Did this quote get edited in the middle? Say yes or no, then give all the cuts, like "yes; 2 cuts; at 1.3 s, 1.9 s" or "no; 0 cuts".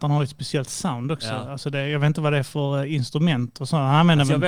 no; 0 cuts